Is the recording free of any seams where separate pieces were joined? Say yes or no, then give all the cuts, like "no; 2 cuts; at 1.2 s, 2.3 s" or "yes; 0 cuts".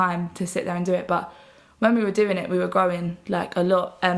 yes; 0 cuts